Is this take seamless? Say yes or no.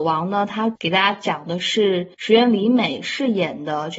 no